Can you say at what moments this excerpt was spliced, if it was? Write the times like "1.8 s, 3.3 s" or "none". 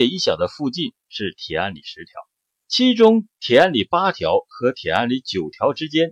2.4 s